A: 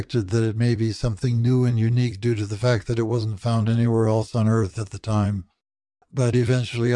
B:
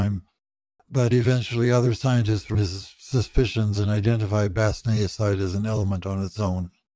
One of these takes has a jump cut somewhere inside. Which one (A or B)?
B